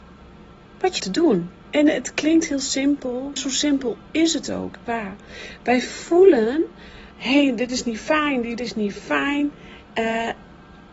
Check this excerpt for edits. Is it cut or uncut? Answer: cut